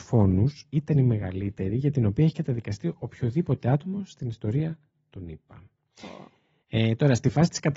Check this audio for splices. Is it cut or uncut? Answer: uncut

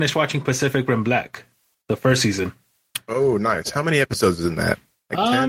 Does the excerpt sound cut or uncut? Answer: uncut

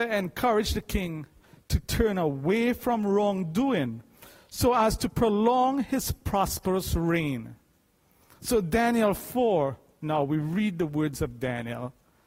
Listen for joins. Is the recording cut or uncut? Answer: uncut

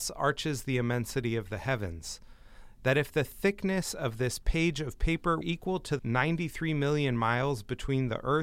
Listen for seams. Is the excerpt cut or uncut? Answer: cut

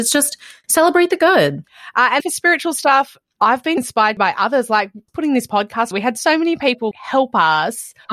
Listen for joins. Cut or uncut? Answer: cut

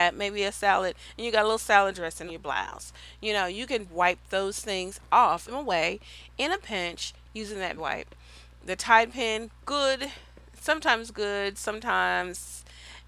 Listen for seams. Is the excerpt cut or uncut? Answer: cut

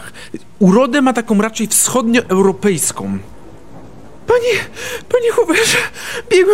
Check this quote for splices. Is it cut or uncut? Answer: uncut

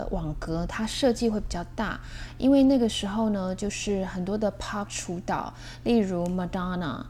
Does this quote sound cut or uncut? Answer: cut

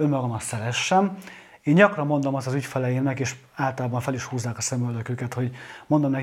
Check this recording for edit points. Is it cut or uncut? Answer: uncut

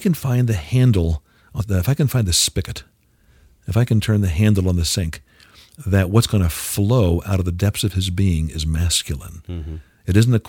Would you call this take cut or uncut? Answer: cut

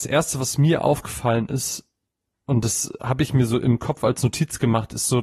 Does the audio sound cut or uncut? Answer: uncut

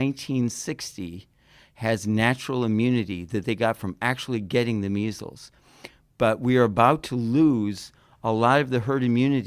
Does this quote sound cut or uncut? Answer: uncut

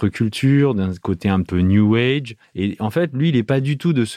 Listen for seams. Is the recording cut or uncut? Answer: cut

